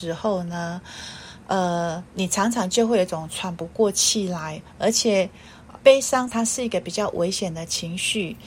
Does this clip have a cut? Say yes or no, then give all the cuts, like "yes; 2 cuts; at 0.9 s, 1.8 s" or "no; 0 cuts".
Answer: yes; 3 cuts; at 2.1 s, 5.8 s, 6.3 s